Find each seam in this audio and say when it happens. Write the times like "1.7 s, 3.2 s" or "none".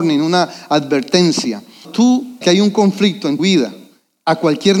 1.8 s, 2.4 s, 3.4 s

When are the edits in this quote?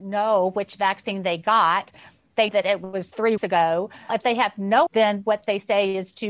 2.5 s, 3.4 s, 4.1 s, 4.9 s

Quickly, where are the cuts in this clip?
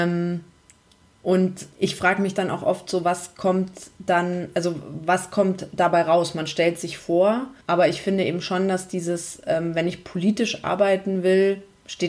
1.7 s, 7.6 s

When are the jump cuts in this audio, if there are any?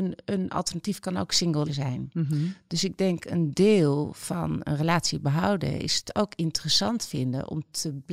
1.7 s

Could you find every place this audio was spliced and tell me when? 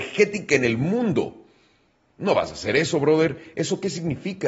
none

